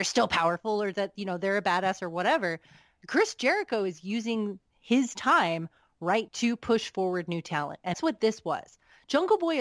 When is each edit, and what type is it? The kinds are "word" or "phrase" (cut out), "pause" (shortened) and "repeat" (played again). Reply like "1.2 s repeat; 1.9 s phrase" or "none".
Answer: 6.3 s word; 7.9 s word